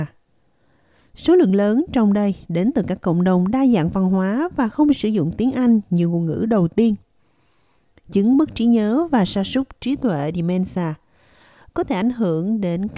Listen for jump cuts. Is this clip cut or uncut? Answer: uncut